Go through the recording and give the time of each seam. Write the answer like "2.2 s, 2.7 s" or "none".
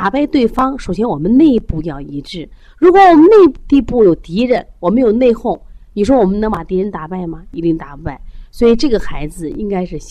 none